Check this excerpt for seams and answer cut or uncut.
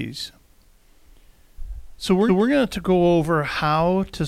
cut